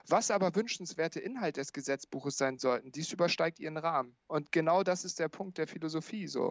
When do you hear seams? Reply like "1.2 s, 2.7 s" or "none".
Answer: 4.2 s